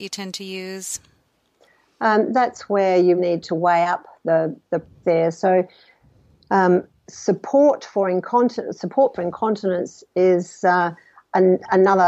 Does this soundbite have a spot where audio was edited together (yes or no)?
yes